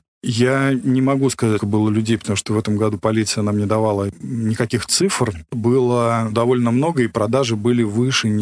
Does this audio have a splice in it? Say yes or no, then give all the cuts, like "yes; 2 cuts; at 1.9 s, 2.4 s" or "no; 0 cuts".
yes; 3 cuts; at 1.6 s, 5.5 s, 6.3 s